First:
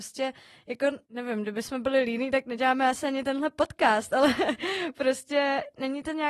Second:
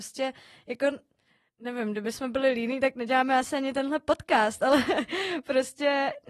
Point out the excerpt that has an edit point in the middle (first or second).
first